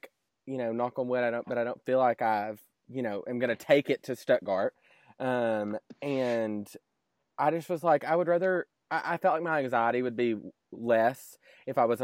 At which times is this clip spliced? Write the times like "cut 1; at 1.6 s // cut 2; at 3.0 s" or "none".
none